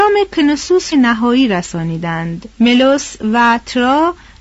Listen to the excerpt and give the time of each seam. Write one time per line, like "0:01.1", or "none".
0:00.9
0:02.5